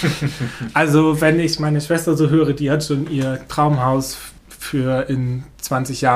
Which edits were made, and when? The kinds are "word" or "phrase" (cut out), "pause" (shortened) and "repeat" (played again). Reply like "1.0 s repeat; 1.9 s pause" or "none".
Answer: 4.4 s pause